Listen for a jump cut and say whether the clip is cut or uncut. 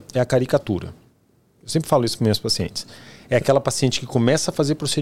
uncut